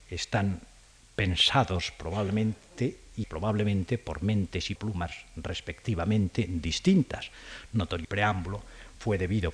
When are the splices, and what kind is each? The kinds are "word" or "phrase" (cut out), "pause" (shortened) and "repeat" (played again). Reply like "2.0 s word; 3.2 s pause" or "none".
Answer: 3.2 s word; 4.8 s word; 8.0 s phrase